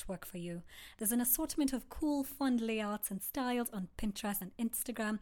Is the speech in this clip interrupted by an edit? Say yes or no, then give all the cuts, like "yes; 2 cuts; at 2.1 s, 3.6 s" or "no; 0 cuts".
no; 0 cuts